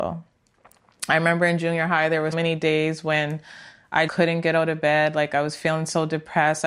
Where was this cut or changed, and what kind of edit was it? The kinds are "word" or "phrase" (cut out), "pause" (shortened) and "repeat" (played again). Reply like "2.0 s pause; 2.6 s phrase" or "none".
2.3 s word; 4.1 s word

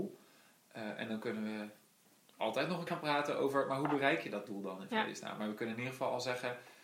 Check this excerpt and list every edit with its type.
2.9 s word

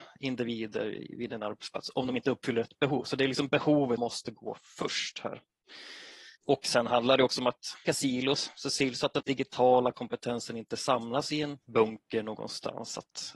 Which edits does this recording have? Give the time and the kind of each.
4.0 s word; 6.4 s pause; 7.9 s word; 9.2 s word; 11.6 s pause

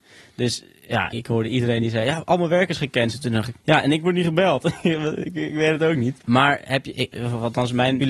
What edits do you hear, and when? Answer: 3.6 s pause; 6.2 s pause

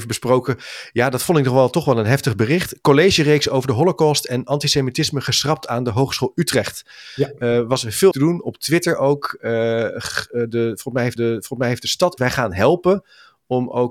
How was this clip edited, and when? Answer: 8.1 s word; 11.2 s repeat; 12.2 s phrase

